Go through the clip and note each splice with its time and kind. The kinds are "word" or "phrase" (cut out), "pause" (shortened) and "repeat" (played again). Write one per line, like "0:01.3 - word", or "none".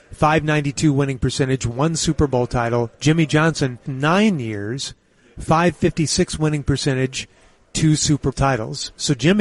0:03.9 - word
0:08.3 - word